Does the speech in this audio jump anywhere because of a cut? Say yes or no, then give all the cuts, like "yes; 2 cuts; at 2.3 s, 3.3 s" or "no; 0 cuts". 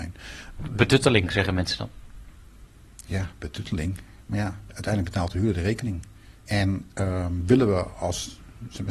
no; 0 cuts